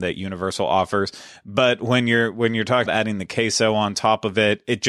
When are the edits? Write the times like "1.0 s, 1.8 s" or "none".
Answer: 2.9 s